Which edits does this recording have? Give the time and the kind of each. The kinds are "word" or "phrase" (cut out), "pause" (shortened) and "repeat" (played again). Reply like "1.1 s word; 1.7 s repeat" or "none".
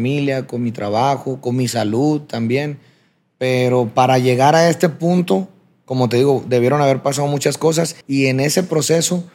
8.0 s pause